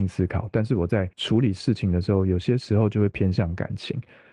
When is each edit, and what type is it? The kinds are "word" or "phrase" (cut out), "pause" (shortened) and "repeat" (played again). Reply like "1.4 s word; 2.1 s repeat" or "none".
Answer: 1.1 s pause